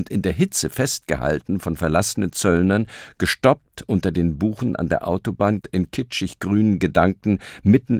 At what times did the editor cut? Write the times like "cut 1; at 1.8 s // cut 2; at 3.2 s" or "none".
cut 1; at 5.6 s